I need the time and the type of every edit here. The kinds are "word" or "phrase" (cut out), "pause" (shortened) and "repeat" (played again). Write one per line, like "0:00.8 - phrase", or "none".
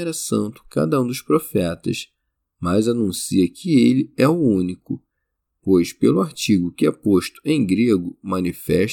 none